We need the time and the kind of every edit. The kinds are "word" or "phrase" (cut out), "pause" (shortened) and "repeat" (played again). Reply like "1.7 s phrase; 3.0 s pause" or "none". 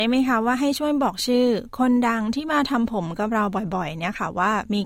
none